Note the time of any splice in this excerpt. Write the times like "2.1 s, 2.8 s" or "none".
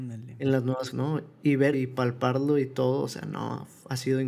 0.9 s, 1.7 s